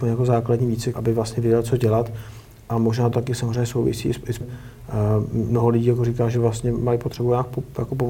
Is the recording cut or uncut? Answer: cut